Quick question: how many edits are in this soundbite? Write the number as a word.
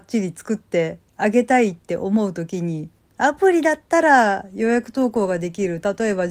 one